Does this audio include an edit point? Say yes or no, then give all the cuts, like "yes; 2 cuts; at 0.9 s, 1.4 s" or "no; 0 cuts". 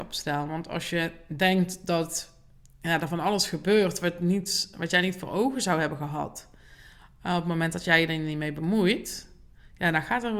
no; 0 cuts